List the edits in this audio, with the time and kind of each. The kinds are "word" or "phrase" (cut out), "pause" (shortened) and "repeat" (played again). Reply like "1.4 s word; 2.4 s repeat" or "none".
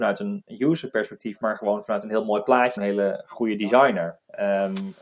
2.8 s word